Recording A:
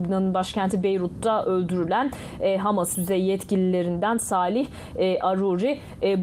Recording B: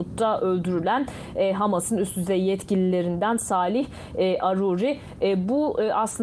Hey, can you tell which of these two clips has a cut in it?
A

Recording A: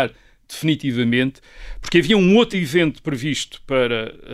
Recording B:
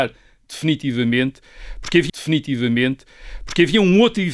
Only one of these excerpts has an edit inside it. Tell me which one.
B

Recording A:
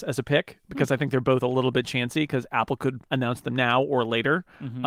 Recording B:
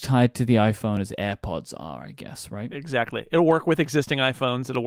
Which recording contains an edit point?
A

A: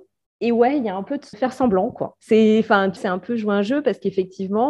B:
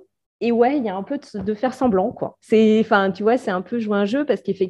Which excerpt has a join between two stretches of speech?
A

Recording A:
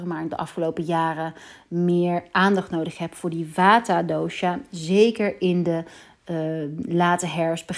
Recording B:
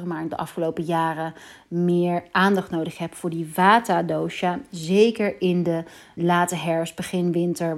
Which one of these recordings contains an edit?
B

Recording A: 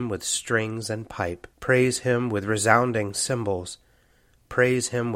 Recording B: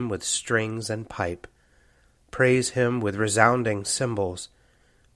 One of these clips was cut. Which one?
A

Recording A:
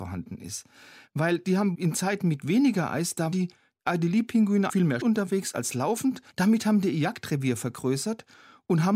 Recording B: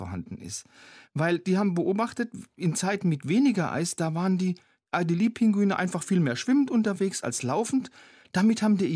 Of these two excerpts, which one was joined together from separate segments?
A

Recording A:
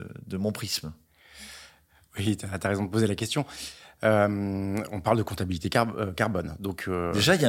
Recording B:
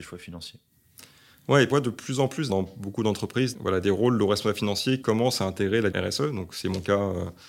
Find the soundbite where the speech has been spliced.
B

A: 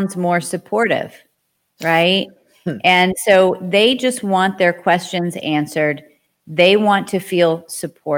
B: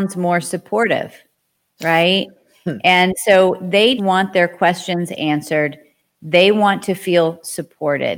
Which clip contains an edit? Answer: B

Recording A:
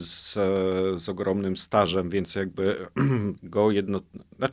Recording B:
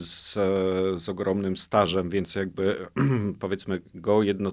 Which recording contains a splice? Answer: A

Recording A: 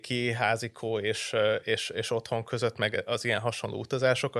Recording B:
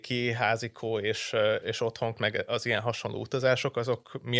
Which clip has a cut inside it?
B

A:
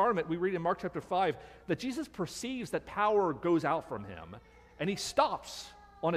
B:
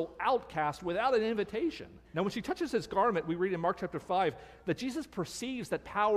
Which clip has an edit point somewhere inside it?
B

